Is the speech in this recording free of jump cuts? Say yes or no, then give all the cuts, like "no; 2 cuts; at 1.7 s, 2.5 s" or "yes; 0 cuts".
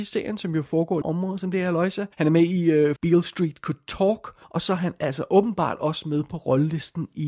no; 4 cuts; at 1.0 s, 2.1 s, 3.0 s, 4.4 s